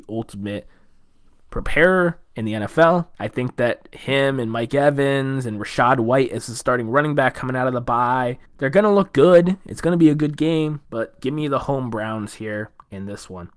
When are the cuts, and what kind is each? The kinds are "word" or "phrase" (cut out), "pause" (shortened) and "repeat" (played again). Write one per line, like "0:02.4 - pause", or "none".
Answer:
0:03.1 - pause
0:08.5 - pause
0:10.8 - pause

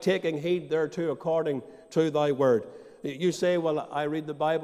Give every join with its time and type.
none

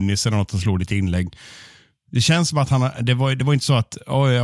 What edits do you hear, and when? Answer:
none

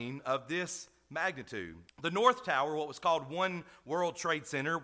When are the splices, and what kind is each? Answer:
0:01.9 - pause

